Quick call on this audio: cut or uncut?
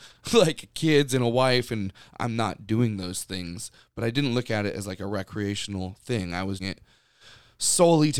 cut